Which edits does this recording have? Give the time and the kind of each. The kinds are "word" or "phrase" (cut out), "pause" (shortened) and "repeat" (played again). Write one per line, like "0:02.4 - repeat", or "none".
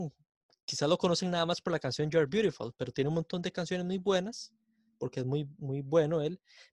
none